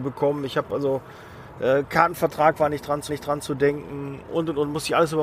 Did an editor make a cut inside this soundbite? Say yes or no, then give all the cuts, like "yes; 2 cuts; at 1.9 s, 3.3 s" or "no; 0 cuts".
yes; 1 cut; at 3.1 s